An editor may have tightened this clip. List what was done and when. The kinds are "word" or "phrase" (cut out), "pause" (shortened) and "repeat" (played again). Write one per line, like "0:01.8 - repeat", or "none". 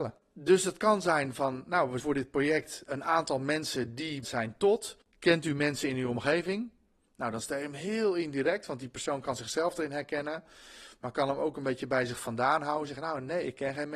0:02.0 - word
0:02.9 - word
0:04.2 - word